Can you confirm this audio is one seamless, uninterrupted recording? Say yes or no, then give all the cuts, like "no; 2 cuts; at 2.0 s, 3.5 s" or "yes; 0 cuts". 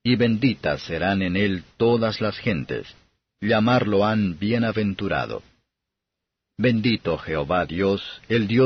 yes; 0 cuts